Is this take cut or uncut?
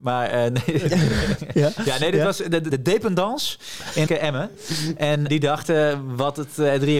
cut